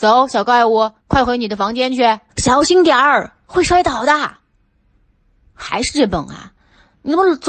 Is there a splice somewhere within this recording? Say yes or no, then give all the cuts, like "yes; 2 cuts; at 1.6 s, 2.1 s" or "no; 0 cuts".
yes; 2 cuts; at 1.0 s, 2.3 s